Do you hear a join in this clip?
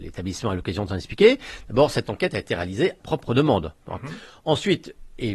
yes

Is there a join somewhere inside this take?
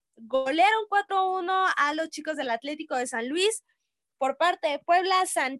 no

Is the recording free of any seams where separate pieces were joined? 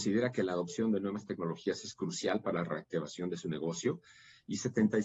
yes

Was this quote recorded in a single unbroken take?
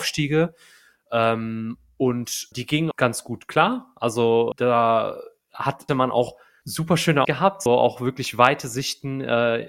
no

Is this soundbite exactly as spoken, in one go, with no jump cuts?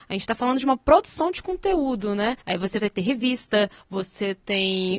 no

